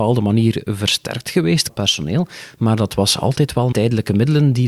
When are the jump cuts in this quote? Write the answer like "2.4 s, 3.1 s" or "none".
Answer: 1.7 s, 3.7 s